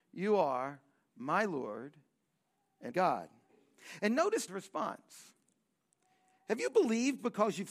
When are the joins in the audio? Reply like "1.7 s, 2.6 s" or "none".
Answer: 2.9 s, 4.5 s